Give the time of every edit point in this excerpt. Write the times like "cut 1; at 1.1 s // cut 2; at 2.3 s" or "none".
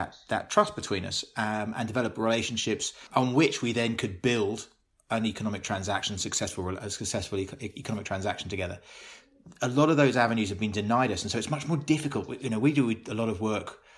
none